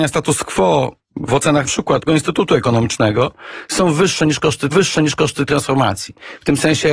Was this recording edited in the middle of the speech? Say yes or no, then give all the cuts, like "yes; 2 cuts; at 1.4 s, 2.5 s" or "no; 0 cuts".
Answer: yes; 3 cuts; at 1.6 s, 2.1 s, 4.7 s